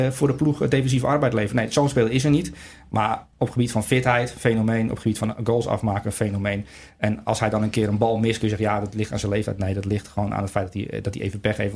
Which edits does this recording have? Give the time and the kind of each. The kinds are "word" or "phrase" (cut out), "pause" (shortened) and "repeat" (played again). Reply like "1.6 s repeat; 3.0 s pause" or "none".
none